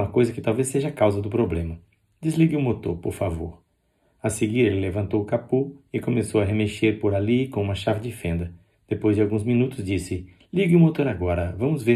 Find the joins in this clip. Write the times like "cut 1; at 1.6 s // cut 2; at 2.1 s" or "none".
none